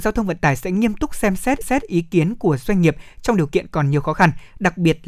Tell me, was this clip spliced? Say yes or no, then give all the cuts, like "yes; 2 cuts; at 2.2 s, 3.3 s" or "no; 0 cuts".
yes; 1 cut; at 1.6 s